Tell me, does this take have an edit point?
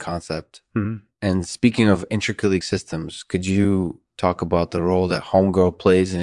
yes; 1 cut; at 2.6 s

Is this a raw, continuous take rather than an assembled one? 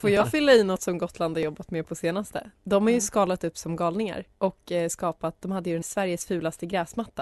no; 2 cuts; at 4.3 s, 5.8 s

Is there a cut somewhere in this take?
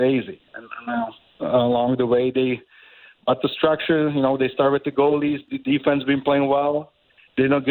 no; 0 cuts

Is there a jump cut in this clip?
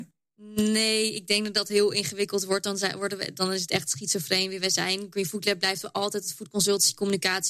no; 0 cuts

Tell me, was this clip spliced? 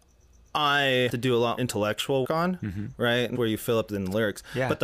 yes; 5 cuts; at 1.1 s, 1.6 s, 2.2 s, 3.3 s, 3.9 s

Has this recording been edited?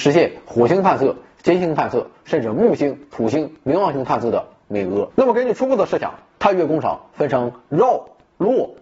yes; 1 cut; at 5.1 s

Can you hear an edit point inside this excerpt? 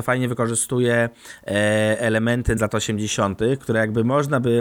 yes; 1 cut; at 2.6 s

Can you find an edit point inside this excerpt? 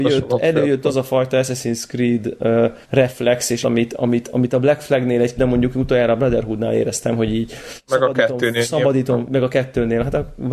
yes; 3 cuts; at 2.8 s, 3.6 s, 5.4 s

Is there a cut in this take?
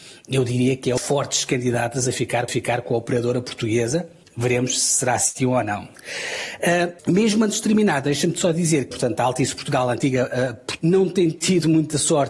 yes; 6 cuts; at 1.0 s, 2.5 s, 4.2 s, 7.0 s, 8.9 s, 10.8 s

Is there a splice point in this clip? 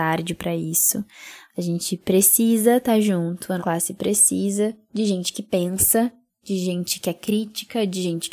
yes; 1 cut; at 3.6 s

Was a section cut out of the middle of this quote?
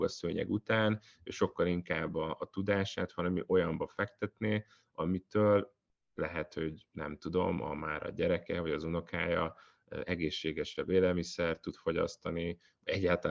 no; 0 cuts

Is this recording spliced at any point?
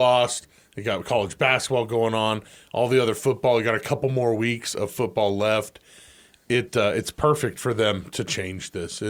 no; 0 cuts

